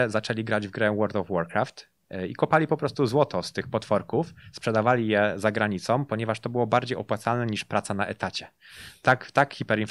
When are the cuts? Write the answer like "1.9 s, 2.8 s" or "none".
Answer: none